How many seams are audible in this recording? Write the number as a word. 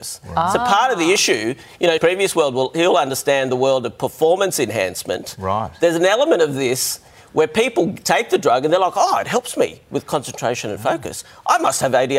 one